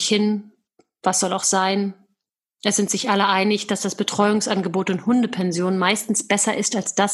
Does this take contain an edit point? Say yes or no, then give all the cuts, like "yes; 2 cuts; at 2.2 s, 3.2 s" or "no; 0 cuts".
no; 0 cuts